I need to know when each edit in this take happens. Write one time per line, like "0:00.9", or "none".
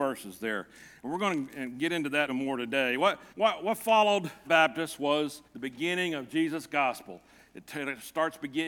0:02.3
0:03.3
0:04.4
0:05.5